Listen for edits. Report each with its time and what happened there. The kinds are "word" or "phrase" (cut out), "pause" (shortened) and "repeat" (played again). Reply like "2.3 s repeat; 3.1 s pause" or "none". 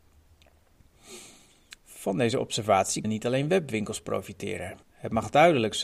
1.8 s pause; 3.0 s word; 4.8 s pause